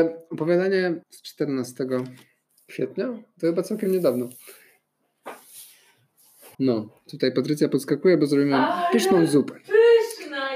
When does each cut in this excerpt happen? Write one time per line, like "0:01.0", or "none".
0:01.0
0:02.5
0:06.5